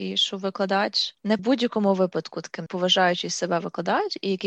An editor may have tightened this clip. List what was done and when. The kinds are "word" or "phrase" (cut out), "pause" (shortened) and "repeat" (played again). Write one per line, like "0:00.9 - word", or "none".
0:01.4 - phrase
0:02.7 - phrase